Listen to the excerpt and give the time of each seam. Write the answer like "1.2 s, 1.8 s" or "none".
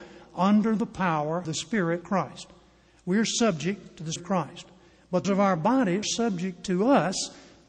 1.4 s, 2.0 s, 4.2 s, 5.2 s, 6.0 s

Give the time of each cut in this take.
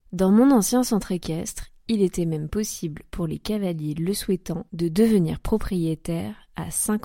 4.7 s

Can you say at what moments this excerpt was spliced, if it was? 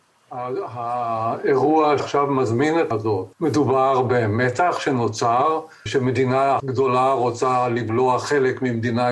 2.0 s, 2.9 s, 3.3 s, 5.9 s, 6.6 s

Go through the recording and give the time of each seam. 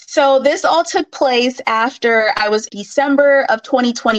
2.7 s

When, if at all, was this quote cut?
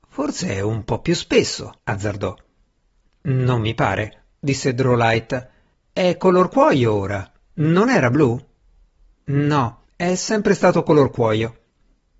1.8 s, 4.3 s, 5.7 s, 9.9 s

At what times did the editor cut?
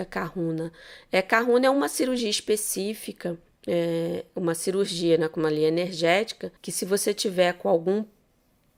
3.5 s, 6.6 s

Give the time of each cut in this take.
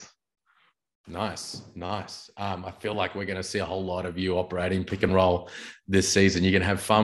none

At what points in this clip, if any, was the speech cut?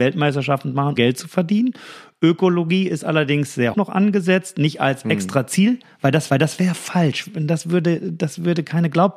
1.0 s, 3.7 s, 6.3 s

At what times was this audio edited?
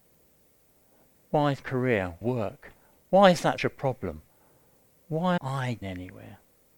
1.6 s, 2.2 s, 3.6 s, 5.4 s, 5.8 s

